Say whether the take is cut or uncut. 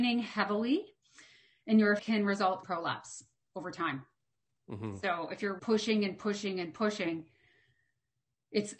cut